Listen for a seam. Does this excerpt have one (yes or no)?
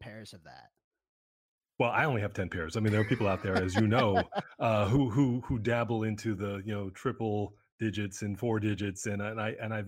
no